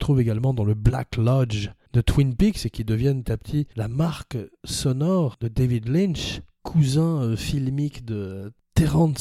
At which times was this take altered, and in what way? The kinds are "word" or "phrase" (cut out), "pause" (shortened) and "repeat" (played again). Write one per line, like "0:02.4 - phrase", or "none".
0:03.2 - word